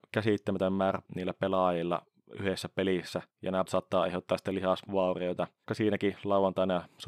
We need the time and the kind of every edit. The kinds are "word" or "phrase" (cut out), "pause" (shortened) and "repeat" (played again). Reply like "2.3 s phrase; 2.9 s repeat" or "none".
1.0 s word; 3.3 s pause; 3.7 s word; 5.7 s phrase